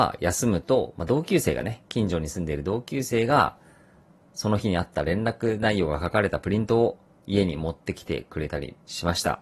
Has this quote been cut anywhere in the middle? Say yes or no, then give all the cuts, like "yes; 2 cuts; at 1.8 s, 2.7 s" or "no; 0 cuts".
no; 0 cuts